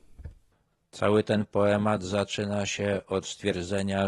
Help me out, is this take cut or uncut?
uncut